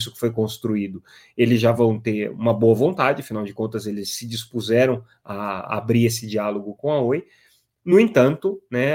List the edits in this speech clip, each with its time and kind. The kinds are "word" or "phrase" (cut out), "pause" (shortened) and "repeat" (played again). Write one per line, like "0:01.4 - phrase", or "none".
none